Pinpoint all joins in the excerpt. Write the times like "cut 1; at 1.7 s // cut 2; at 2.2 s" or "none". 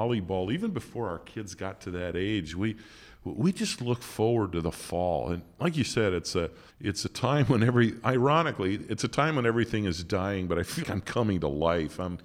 cut 1; at 6.7 s // cut 2; at 10.8 s